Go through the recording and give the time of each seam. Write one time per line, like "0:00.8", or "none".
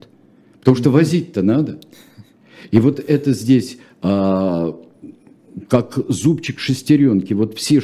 none